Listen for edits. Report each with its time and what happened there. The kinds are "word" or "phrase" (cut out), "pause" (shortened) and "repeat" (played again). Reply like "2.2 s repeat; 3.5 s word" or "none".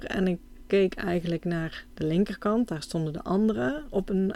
none